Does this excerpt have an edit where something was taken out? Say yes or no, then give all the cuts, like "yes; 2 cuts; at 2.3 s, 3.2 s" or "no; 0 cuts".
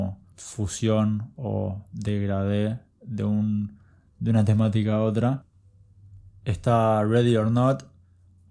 no; 0 cuts